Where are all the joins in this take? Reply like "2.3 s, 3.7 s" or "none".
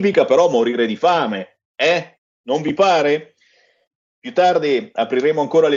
none